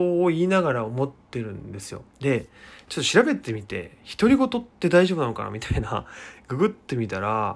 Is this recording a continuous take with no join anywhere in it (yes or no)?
no